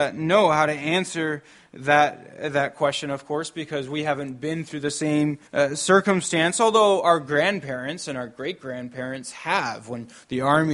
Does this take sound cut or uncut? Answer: cut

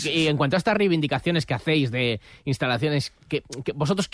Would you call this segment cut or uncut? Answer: uncut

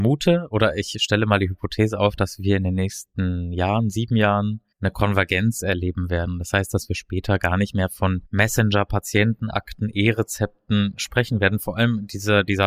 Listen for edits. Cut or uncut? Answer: cut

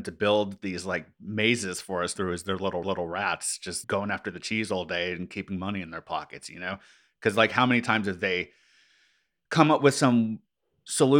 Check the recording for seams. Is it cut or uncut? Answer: cut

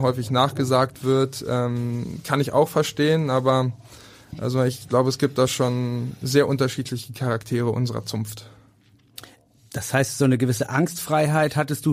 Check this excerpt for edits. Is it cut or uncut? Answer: uncut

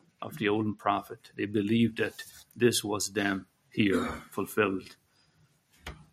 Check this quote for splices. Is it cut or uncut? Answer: uncut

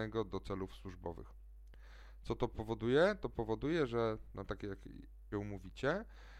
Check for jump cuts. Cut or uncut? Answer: cut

